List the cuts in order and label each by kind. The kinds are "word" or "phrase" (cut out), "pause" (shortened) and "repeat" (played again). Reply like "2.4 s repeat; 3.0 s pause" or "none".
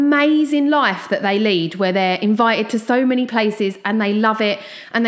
none